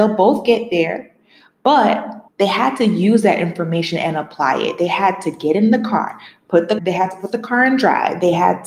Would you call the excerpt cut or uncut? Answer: cut